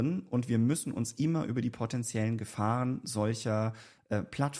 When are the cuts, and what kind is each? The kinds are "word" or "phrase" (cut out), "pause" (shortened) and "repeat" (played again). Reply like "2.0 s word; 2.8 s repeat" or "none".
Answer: none